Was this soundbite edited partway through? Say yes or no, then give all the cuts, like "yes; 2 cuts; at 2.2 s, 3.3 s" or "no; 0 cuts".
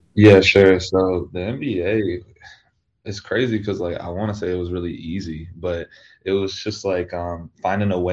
no; 0 cuts